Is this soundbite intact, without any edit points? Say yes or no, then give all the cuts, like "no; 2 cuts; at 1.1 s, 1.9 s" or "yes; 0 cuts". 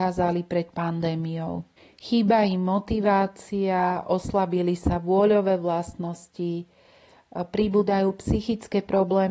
yes; 0 cuts